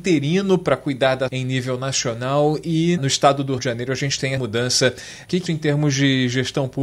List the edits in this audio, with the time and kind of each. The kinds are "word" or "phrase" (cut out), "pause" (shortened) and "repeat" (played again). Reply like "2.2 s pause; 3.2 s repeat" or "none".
1.3 s word; 3.0 s word; 3.6 s word; 4.4 s word; 5.5 s word

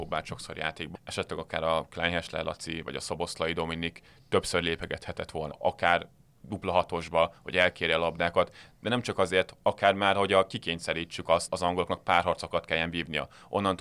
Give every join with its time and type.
0.9 s word; 5.5 s word; 11.5 s word

